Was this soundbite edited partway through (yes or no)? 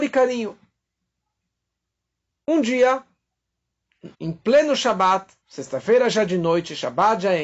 yes